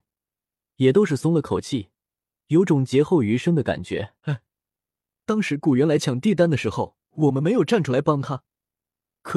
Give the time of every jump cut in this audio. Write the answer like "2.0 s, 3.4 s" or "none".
4.2 s, 7.0 s